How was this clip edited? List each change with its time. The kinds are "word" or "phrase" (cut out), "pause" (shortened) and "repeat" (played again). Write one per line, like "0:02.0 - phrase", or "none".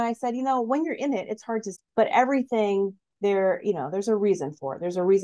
0:01.7 - word